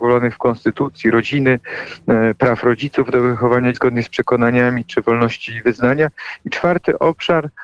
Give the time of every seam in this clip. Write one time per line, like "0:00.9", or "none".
0:03.7

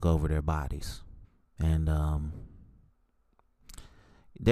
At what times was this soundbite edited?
0:01.2

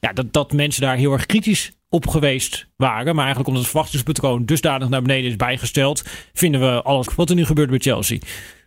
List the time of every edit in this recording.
0:07.1

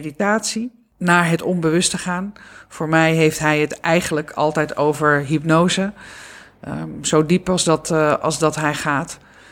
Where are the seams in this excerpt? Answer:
none

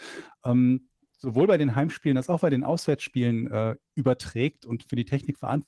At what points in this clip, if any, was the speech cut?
none

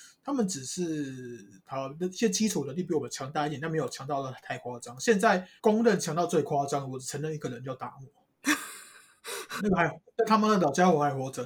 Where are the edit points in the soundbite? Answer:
0:05.6
0:09.6

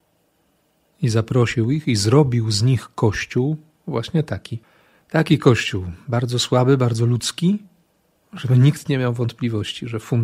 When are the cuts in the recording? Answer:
none

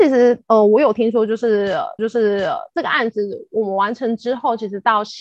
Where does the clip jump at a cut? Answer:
0:02.0

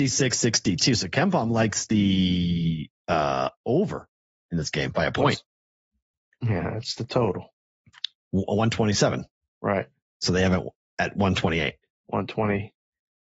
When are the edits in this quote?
none

